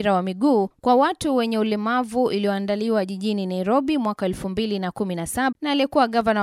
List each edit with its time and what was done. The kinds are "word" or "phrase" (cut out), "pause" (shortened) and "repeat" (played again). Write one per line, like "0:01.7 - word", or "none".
0:05.5 - word